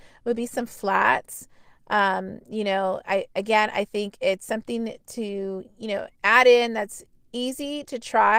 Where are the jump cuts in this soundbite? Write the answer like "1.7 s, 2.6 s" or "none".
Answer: none